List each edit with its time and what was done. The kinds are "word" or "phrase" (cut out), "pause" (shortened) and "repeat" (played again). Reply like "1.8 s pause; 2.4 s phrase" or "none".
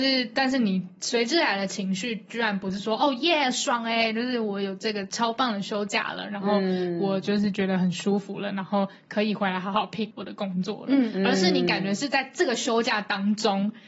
10.1 s word